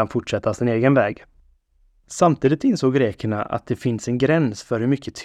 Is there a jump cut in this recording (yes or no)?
no